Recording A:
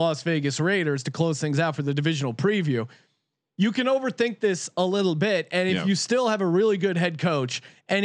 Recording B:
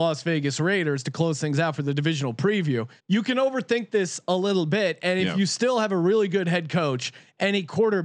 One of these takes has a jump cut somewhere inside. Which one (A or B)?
B